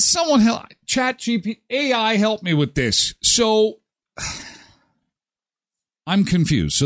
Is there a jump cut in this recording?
no; 0 cuts

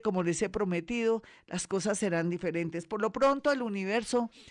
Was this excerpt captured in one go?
yes; 0 cuts

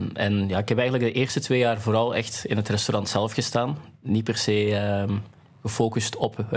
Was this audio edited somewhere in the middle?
no; 0 cuts

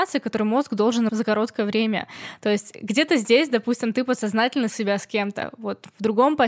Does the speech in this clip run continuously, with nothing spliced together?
no; 2 cuts; at 1.1 s, 4.7 s

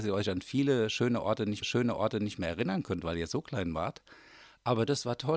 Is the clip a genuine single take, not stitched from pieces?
no; 1 cut; at 1.6 s

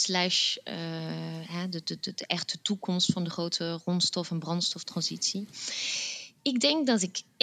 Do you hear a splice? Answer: no; 0 cuts

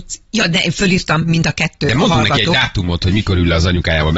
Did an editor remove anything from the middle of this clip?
no; 0 cuts

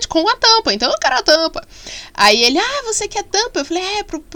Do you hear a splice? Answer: no; 0 cuts

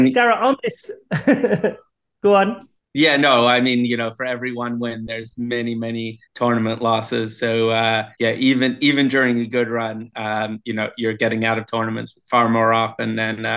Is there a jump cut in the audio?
yes; 3 cuts; at 2.8 s, 6.2 s, 8.1 s

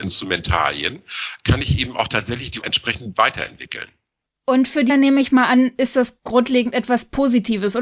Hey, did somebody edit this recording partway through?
yes; 2 cuts; at 2.6 s, 4.9 s

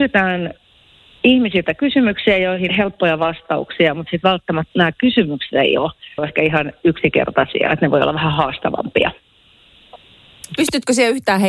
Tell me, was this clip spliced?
yes; 3 cuts; at 2.7 s, 4.7 s, 6.2 s

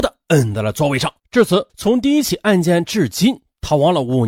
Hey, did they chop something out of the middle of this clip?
yes; 2 cuts; at 1.2 s, 1.7 s

